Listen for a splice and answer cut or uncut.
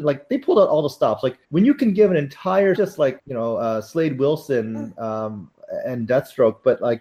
cut